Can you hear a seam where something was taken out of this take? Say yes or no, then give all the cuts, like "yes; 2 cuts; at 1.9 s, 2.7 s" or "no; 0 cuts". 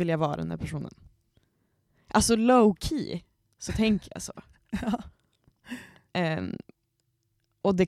no; 0 cuts